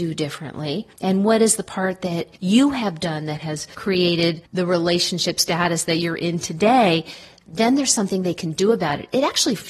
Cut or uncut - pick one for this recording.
uncut